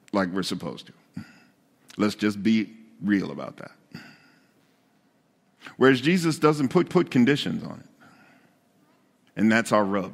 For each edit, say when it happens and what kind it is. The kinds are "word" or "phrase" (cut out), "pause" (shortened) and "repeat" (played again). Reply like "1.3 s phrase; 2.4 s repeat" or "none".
6.9 s repeat

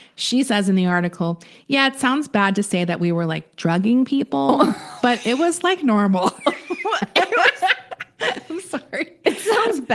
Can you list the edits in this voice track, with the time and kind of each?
none

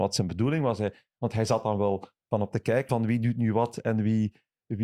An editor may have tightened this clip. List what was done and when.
2.5 s word; 2.9 s word

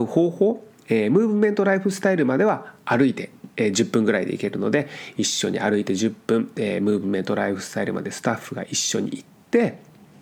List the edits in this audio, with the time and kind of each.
none

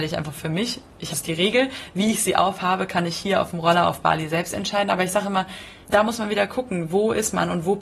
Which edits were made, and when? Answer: 1.1 s phrase; 5.8 s pause

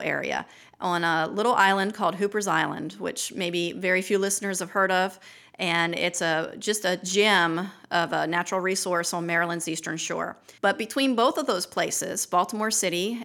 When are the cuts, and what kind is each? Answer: 10.6 s pause

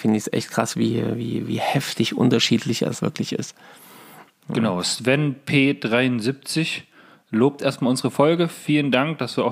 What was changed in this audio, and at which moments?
3.0 s word

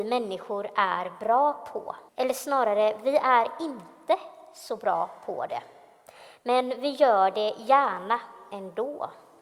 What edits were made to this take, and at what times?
2.1 s pause

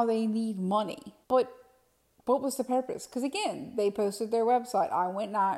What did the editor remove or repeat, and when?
1.2 s pause

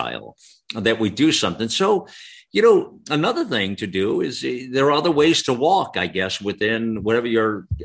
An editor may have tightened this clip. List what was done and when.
none

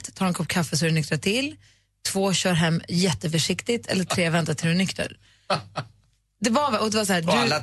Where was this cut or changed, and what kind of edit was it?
none

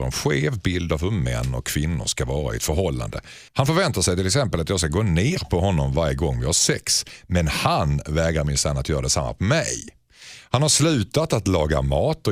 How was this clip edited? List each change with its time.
3.5 s pause

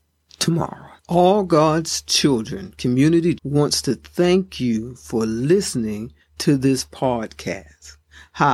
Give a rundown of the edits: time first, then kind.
1.0 s pause; 3.4 s word

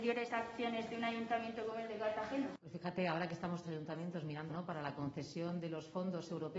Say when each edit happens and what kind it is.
3.6 s phrase; 4.5 s phrase

